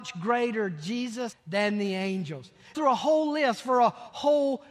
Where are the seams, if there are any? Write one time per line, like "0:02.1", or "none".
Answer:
0:01.3
0:02.7